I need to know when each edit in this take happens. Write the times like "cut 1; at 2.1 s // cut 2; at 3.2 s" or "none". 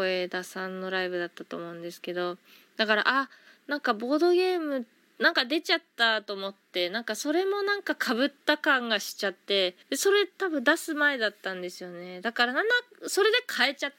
cut 1; at 9.8 s // cut 2; at 10.3 s